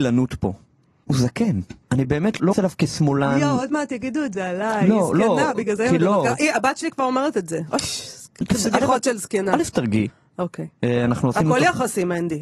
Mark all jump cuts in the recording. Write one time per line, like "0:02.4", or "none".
0:01.8
0:02.5